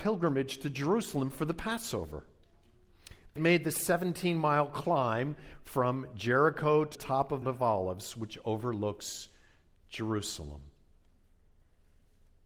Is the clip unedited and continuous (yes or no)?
no